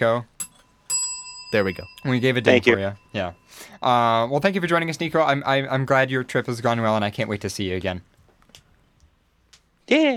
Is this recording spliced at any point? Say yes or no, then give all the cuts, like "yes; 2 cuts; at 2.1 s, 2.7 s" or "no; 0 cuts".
yes; 2 cuts; at 2.0 s, 3.0 s